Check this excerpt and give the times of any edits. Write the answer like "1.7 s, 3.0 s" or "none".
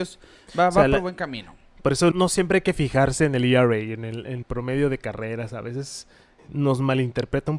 2.1 s, 4.4 s, 6.4 s